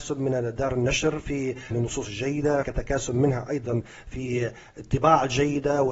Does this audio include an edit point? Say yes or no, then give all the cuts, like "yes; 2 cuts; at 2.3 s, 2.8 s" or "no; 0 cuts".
yes; 2 cuts; at 1.7 s, 2.6 s